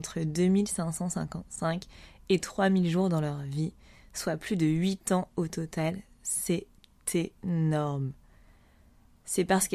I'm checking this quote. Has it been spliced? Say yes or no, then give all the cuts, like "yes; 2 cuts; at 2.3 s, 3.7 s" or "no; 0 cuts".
no; 0 cuts